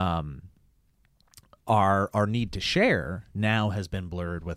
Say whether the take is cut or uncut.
uncut